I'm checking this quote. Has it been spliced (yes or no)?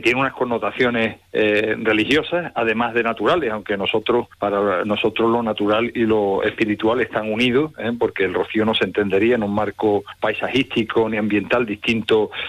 no